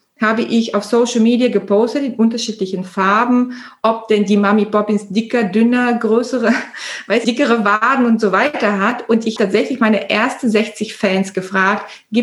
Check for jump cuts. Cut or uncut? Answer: cut